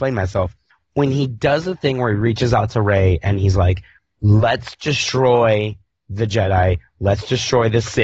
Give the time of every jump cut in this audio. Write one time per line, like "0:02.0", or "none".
none